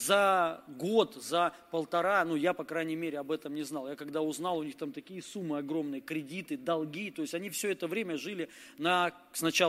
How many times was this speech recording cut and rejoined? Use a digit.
0